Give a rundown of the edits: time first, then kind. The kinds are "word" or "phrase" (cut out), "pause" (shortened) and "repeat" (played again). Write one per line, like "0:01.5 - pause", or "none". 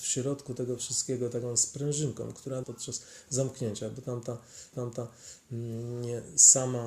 0:02.6 - word
0:04.7 - repeat